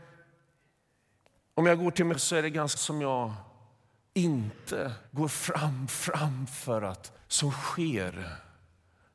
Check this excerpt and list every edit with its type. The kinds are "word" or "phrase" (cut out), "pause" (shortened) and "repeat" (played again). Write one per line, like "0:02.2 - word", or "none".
0:02.1 - word
0:02.8 - word
0:05.1 - pause
0:05.9 - repeat
0:07.2 - phrase